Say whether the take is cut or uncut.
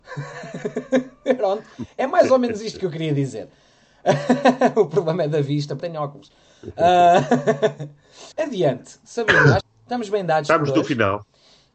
cut